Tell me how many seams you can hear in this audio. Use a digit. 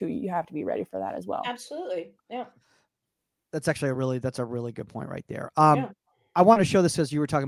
0